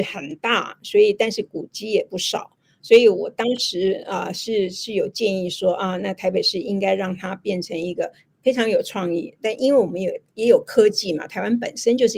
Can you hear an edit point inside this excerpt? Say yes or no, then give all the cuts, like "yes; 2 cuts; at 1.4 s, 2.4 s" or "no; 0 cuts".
no; 0 cuts